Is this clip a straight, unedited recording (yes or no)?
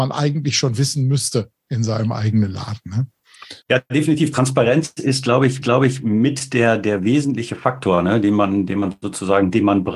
no